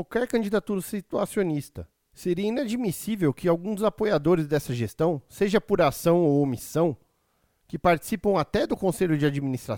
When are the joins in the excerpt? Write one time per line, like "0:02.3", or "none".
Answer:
none